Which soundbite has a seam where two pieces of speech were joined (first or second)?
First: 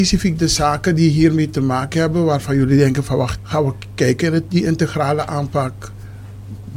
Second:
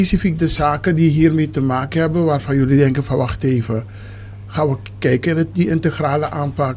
first